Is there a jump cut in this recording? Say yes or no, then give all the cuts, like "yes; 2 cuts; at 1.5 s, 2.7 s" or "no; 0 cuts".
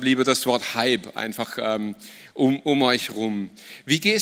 no; 0 cuts